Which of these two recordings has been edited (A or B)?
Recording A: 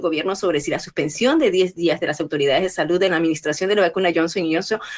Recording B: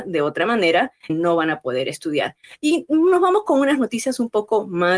B